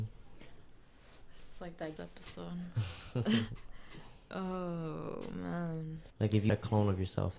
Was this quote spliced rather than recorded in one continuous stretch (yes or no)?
yes